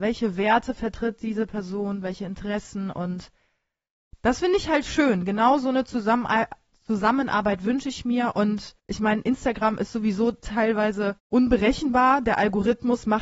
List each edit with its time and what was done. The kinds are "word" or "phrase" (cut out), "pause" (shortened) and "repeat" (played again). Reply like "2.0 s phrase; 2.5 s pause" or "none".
8.8 s pause; 11.2 s pause